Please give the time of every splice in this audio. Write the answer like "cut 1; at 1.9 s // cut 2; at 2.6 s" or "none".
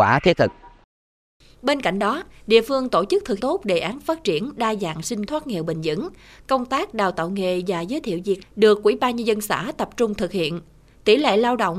cut 1; at 3.4 s // cut 2; at 5.3 s // cut 3; at 8.4 s